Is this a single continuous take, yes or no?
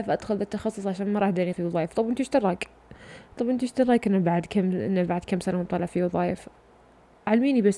no